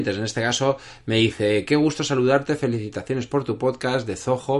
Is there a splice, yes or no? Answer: no